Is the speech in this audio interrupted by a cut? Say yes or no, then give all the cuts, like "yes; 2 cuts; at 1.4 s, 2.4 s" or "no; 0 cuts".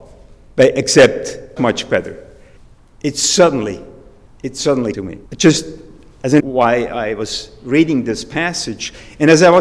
yes; 6 cuts; at 1.6 s, 2.6 s, 4.3 s, 4.9 s, 5.3 s, 6.4 s